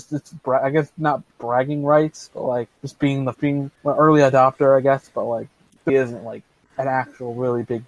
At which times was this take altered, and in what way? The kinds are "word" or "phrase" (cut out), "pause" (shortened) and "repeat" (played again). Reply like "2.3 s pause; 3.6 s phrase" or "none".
1.3 s pause; 2.8 s pause; 3.3 s word; 3.8 s pause; 5.9 s word